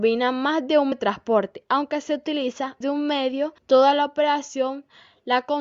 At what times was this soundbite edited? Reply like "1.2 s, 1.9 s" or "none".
0.9 s, 2.8 s, 3.6 s